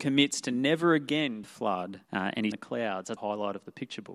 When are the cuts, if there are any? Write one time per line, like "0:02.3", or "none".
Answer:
0:01.4
0:02.0
0:02.5
0:03.2